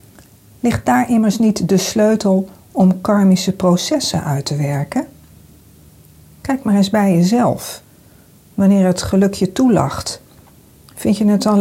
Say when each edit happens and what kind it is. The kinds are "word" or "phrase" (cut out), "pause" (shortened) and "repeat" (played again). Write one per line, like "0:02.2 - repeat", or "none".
none